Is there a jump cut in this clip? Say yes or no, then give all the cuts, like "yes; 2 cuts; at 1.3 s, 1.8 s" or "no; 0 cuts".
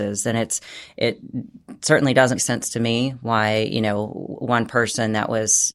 yes; 1 cut; at 2.4 s